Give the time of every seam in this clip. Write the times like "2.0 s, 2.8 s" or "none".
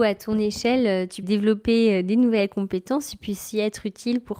1.2 s